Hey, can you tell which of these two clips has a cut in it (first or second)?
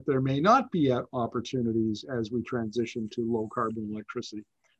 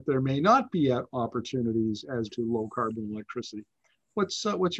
second